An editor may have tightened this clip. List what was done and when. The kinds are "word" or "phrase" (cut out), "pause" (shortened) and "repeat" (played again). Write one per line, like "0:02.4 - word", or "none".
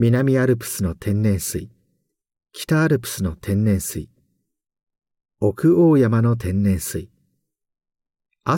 none